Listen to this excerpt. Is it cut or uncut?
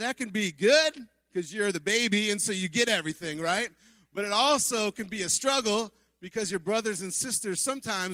uncut